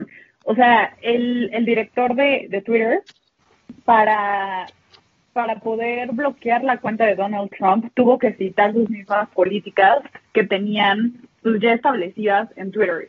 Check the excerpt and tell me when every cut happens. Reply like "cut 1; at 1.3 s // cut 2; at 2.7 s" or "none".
cut 1; at 10.3 s